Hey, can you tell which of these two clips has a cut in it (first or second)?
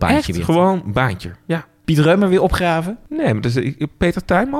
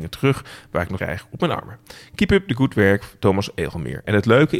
second